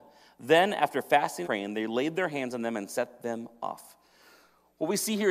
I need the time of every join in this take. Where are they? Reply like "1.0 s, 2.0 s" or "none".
1.4 s